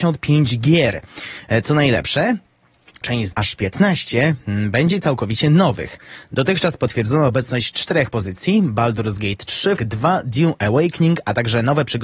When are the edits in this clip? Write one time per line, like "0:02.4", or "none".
0:03.0
0:03.3
0:09.8